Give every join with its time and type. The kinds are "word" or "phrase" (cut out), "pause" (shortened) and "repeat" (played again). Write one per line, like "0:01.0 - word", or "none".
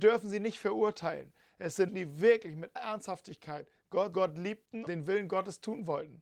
0:01.9 - word
0:02.8 - word
0:04.1 - word
0:04.9 - word